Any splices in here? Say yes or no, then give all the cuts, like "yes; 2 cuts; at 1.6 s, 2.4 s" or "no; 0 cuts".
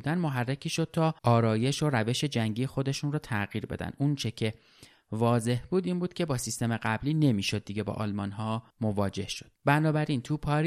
yes; 3 cuts; at 1.2 s, 8.7 s, 9.6 s